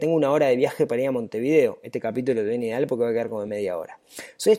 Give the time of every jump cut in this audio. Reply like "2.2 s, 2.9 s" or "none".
none

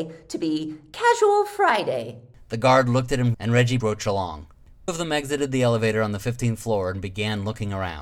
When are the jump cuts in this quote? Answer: 3.3 s, 3.8 s, 4.9 s

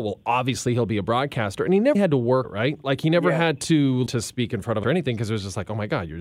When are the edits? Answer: 1.9 s, 2.4 s, 4.1 s, 4.8 s

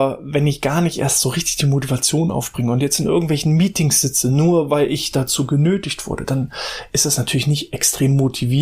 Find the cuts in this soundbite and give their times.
none

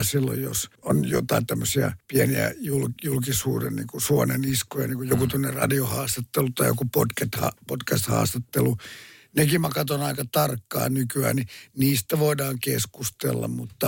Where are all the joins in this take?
none

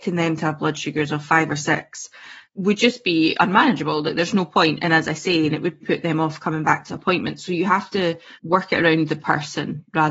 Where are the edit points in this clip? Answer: 2.4 s, 5.5 s, 5.8 s, 8.3 s

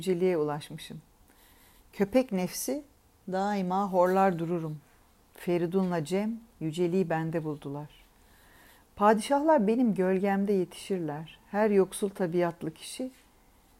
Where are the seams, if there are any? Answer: none

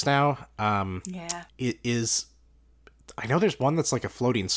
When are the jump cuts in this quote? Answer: 1.5 s

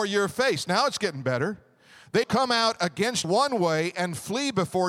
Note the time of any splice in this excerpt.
2.2 s, 3.2 s

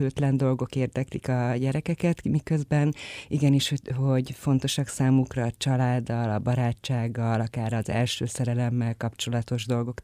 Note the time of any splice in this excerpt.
none

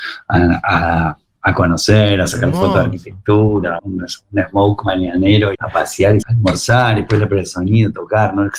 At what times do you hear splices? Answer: 3.8 s, 5.5 s, 6.2 s

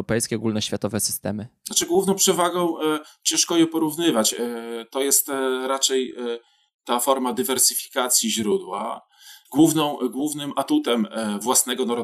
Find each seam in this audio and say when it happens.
none

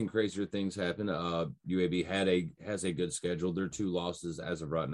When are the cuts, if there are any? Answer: none

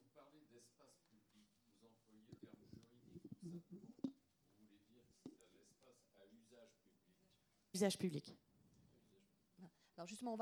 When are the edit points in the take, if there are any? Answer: 1.6 s, 2.4 s, 7.7 s

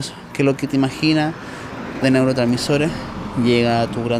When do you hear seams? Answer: 2.0 s

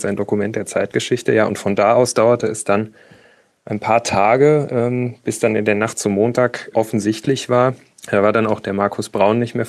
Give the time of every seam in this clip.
none

